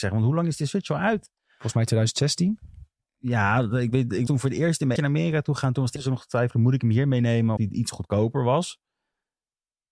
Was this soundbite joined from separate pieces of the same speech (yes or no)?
yes